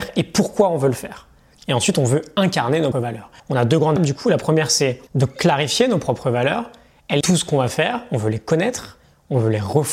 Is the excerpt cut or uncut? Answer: cut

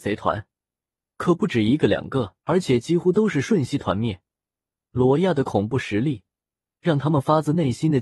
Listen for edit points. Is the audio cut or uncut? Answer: cut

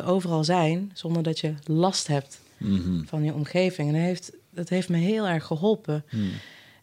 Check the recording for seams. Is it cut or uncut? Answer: uncut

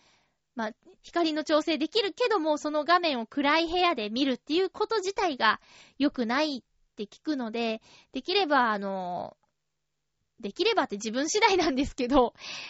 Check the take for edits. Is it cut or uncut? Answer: cut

